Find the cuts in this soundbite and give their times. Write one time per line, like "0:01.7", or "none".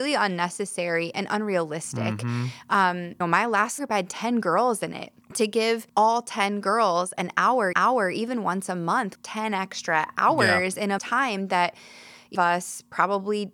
0:03.2
0:03.8
0:05.2
0:05.9
0:07.7
0:09.1
0:11.0
0:12.3